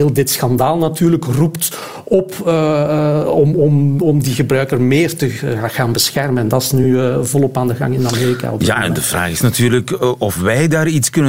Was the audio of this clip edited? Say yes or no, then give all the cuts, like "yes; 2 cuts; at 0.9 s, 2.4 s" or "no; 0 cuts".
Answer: no; 0 cuts